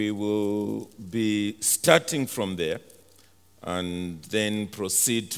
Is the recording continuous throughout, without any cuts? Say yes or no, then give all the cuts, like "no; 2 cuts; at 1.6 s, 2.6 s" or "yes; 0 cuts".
yes; 0 cuts